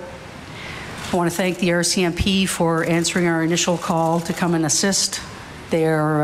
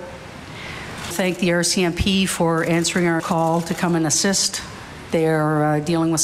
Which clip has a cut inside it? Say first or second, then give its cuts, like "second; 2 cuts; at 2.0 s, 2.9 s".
second; 2 cuts; at 1.1 s, 3.2 s